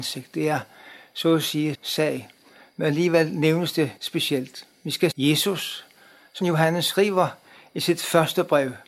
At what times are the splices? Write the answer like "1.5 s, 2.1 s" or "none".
1.7 s, 4.0 s, 5.1 s, 6.4 s